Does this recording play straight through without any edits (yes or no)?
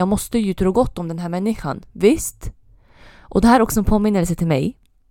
yes